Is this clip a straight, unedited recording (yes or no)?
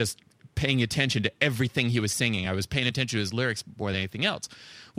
yes